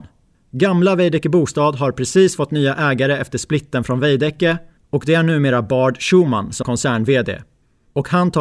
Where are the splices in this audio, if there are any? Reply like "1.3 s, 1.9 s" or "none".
6.6 s